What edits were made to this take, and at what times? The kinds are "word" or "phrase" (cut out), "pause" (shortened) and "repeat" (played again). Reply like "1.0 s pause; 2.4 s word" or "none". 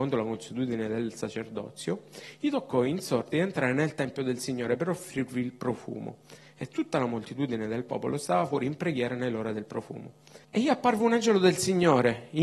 10.4 s pause